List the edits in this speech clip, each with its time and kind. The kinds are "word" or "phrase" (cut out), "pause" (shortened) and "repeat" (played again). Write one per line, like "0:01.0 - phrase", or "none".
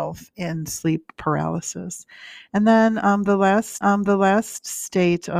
0:03.8 - repeat